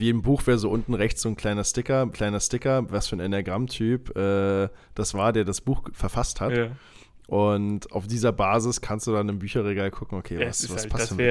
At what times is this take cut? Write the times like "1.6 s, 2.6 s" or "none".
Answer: 2.1 s